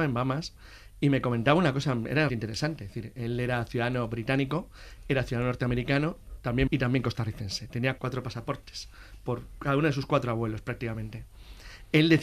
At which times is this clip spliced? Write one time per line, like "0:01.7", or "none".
0:02.3
0:06.7
0:08.0